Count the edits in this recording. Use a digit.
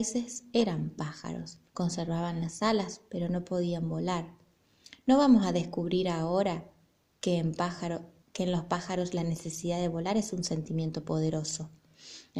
2